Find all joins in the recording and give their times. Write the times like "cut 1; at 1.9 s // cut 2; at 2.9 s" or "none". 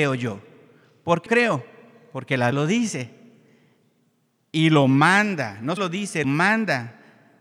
cut 1; at 1.3 s // cut 2; at 2.5 s // cut 3; at 5.8 s // cut 4; at 6.2 s